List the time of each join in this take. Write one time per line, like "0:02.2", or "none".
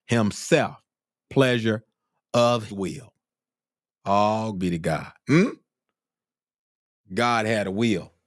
0:01.3
0:02.7
0:04.6
0:05.2